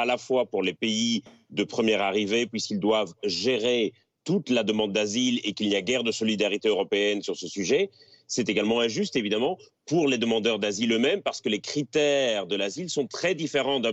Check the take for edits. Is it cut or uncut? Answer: uncut